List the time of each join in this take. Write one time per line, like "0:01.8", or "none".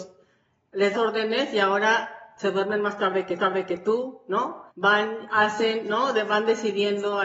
0:00.9
0:03.4
0:04.7